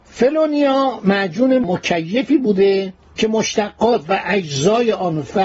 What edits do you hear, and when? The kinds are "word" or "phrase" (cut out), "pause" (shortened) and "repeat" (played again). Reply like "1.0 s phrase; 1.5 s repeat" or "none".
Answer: none